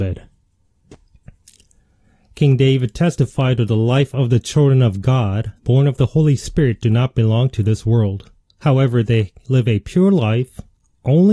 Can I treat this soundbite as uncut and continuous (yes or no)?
no